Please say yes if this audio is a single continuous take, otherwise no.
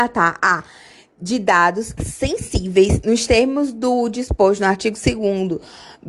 no